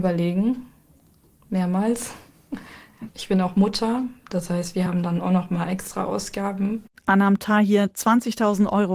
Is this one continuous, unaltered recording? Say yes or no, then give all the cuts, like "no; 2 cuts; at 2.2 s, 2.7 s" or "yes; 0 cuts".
yes; 0 cuts